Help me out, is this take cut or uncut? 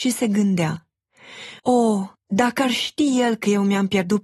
cut